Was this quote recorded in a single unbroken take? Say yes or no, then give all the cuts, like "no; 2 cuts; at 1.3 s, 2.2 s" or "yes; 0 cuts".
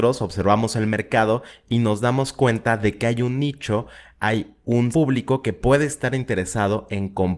no; 1 cut; at 4.9 s